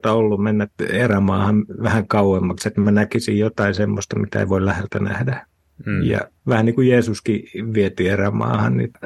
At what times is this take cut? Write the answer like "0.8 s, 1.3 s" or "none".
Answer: none

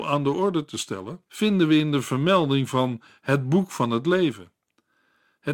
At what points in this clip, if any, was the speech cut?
1.3 s

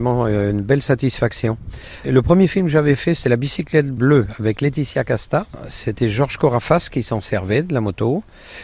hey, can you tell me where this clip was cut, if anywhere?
none

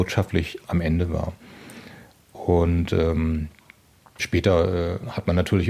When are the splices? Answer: none

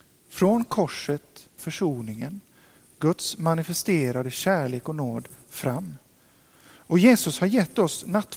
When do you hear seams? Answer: 1.6 s

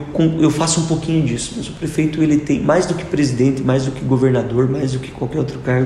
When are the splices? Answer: none

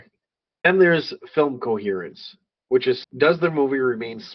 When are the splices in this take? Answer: 3.0 s

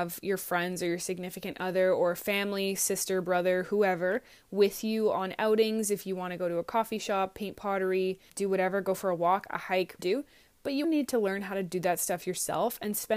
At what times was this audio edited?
8.3 s, 10.0 s, 10.8 s

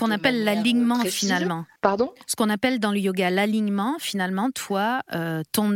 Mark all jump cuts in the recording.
1.8 s

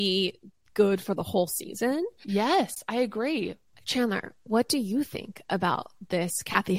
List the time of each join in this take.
1.0 s, 3.7 s

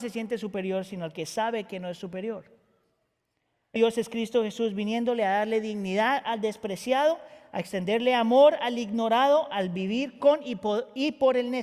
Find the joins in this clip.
3.8 s

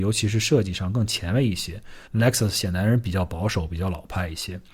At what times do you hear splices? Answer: 2.0 s

